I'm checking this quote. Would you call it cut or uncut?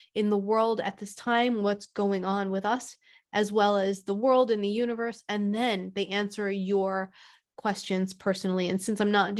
uncut